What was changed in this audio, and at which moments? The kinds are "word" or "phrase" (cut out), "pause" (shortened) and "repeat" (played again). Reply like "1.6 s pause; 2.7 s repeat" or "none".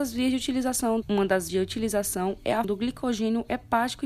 1.0 s word; 1.5 s word; 2.6 s word